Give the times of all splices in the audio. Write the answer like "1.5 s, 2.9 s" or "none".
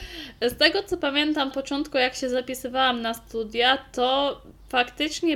1.5 s